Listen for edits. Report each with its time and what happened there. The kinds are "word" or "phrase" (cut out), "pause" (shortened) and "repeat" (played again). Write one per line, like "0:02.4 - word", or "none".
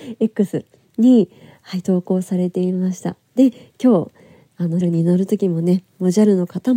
0:04.8 - word

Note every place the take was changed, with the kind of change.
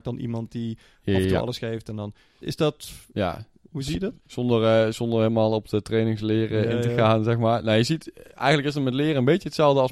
0:02.4 - word
0:03.1 - pause

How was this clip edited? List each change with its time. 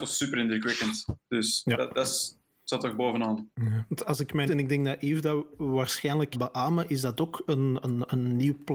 0:03.5 - pause
0:04.5 - phrase
0:06.3 - word

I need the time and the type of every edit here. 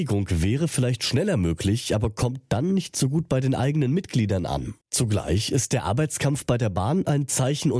0:04.8 - pause

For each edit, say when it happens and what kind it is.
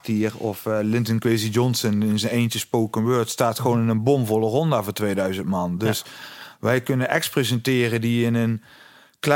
none

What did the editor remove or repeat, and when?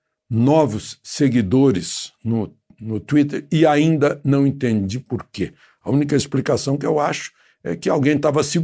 none

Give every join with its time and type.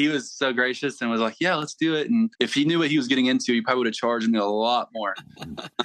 0:02.3 - pause

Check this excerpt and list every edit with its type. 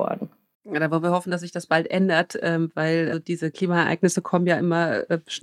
0:03.1 - word

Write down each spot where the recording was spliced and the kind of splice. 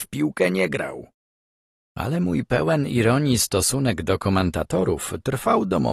none

